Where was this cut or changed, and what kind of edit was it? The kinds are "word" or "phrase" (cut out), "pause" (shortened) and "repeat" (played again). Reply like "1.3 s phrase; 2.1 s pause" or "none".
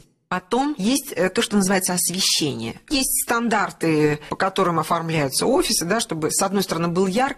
none